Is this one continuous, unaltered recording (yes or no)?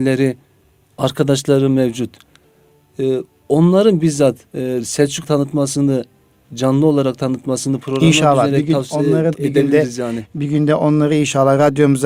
no